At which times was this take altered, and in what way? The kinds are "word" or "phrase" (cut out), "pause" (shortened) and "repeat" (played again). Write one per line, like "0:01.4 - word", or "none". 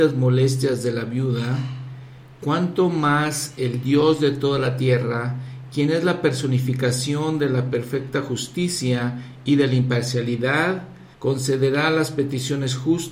0:11.1 - pause